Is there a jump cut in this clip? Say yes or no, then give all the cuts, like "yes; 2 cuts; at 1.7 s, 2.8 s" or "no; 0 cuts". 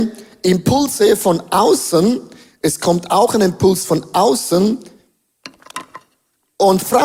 no; 0 cuts